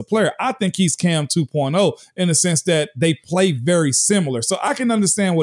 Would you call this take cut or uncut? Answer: uncut